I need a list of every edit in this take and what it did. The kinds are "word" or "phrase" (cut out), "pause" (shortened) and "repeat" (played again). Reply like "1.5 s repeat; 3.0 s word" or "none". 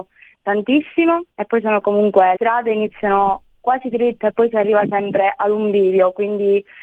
1.3 s pause; 1.8 s word; 2.4 s word; 3.9 s word